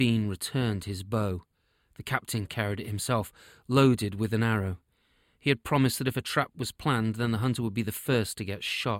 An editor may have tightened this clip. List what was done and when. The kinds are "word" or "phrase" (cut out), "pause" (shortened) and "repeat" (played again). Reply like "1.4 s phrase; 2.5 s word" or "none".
none